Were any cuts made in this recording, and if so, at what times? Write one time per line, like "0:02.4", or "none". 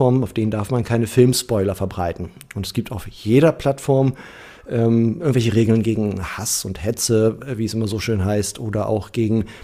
none